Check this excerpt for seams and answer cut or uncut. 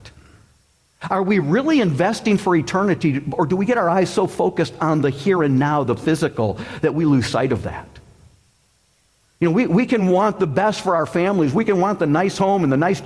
uncut